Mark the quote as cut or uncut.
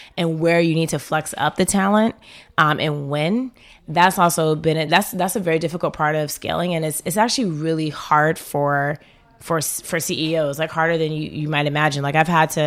uncut